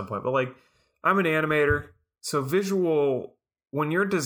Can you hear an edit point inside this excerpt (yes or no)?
no